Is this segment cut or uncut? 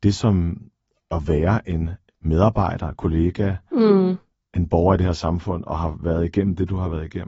uncut